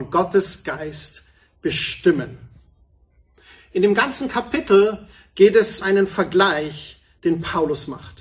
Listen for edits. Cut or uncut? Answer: cut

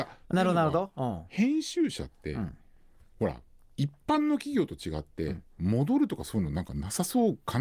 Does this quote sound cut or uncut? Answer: uncut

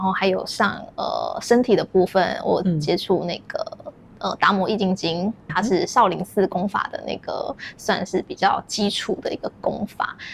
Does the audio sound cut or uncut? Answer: cut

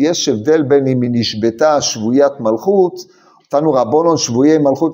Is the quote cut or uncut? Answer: uncut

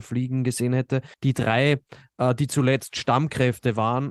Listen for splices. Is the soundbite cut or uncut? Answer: cut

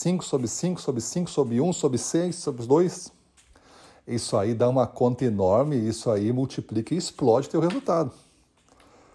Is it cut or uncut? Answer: uncut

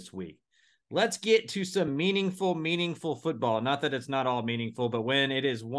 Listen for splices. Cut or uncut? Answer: uncut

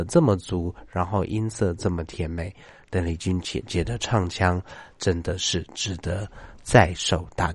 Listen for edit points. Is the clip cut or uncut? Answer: uncut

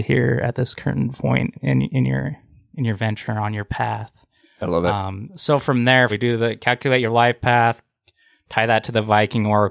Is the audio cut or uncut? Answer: cut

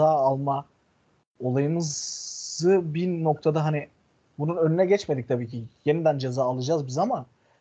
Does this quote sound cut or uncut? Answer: uncut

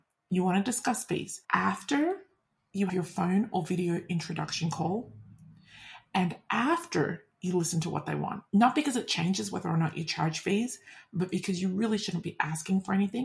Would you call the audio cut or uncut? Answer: cut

